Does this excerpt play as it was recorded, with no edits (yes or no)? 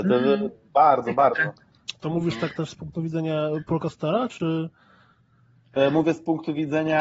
yes